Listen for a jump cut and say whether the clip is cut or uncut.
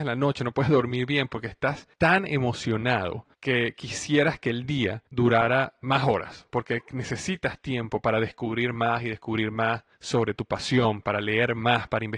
cut